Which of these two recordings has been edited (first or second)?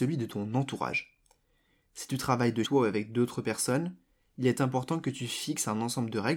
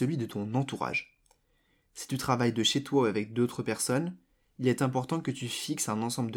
first